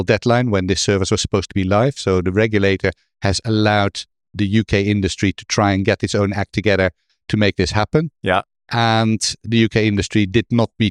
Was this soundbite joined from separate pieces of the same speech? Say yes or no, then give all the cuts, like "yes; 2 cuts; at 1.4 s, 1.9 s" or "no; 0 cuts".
no; 0 cuts